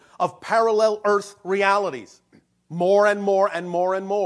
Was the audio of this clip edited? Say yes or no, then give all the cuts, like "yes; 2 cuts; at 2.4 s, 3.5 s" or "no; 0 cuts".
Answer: no; 0 cuts